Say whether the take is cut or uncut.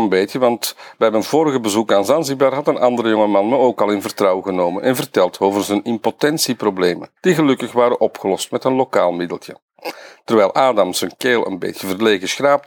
cut